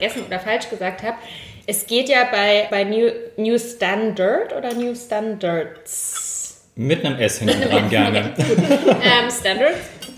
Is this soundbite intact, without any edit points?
no; 1 cut; at 2.7 s

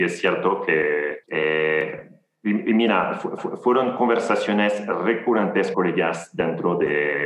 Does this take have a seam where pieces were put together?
yes; 3 cuts; at 1.2 s, 3.4 s, 5.7 s

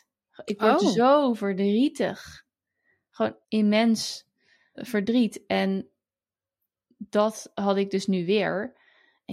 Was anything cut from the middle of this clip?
yes; 2 cuts; at 3.4 s, 4.7 s

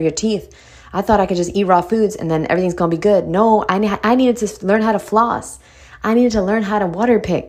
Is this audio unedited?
yes; 0 cuts

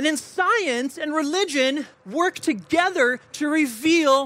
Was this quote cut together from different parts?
yes; 1 cut; at 1.9 s

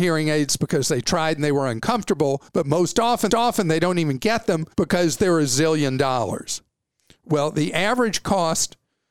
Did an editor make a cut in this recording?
yes; 3 cuts; at 2.5 s, 3.3 s, 4.7 s

